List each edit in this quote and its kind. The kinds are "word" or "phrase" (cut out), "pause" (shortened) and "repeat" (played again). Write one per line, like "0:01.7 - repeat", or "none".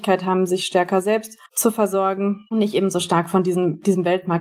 0:01.5 - pause